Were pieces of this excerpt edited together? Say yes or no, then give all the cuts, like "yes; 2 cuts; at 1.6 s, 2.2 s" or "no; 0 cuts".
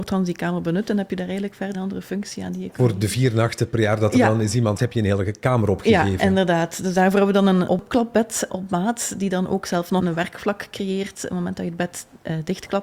yes; 5 cuts; at 1.7 s, 4.8 s, 7.7 s, 8.5 s, 10.0 s